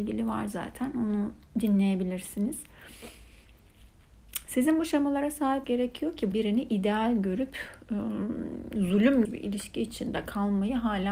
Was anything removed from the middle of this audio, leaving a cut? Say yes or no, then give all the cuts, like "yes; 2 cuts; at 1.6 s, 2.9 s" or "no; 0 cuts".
yes; 3 cuts; at 5.6 s, 6.3 s, 9.2 s